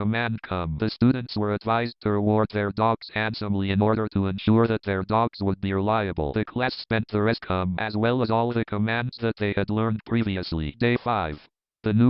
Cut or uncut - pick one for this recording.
cut